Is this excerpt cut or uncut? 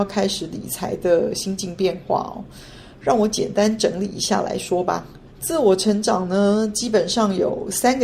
cut